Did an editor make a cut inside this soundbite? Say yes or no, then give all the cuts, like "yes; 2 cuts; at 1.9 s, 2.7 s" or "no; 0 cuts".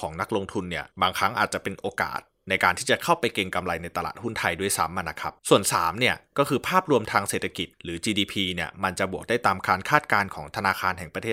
yes; 3 cuts; at 0.9 s, 5.4 s, 7.7 s